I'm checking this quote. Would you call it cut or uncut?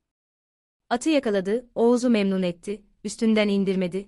uncut